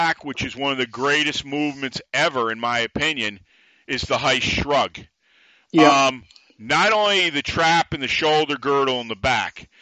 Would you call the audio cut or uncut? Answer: uncut